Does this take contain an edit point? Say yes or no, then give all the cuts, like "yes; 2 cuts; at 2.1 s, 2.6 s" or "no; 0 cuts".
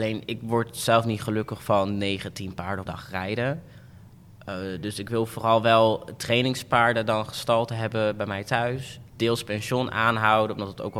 yes; 2 cuts; at 2.9 s, 9.1 s